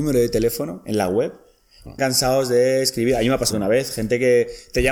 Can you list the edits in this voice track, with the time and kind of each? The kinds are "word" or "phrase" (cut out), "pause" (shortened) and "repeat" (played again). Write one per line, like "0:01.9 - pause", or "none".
0:02.0 - phrase
0:03.5 - word